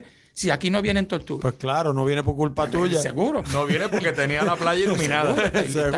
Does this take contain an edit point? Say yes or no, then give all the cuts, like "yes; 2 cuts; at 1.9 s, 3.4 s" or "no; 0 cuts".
no; 0 cuts